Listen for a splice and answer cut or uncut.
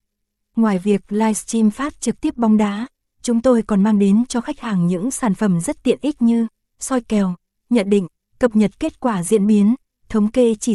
uncut